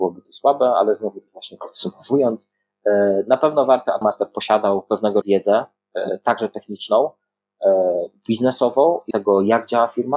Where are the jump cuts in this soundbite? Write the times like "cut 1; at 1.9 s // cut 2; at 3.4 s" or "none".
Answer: cut 1; at 1.3 s // cut 2; at 4.0 s // cut 3; at 5.2 s // cut 4; at 9.1 s